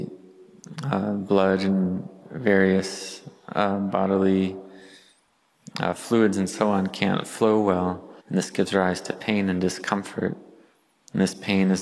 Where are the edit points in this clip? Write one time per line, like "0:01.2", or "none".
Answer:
0:08.2